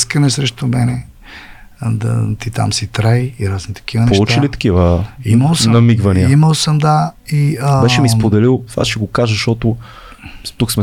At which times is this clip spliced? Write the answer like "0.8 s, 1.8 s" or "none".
none